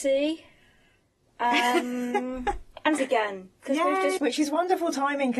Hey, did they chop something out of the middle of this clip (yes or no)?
yes